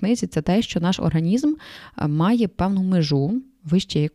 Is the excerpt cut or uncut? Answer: uncut